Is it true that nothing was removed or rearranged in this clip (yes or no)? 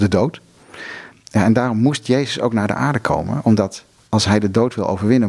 yes